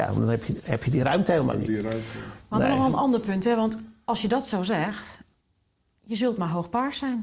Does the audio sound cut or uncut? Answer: uncut